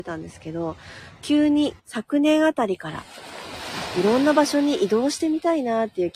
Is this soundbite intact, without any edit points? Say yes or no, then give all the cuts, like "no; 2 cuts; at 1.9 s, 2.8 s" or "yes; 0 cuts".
no; 1 cut; at 1.8 s